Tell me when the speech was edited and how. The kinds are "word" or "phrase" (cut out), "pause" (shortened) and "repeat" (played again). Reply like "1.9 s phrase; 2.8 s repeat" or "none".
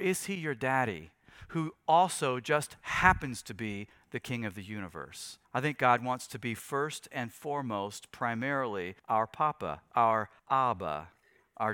5.4 s pause; 9.0 s pause; 10.4 s pause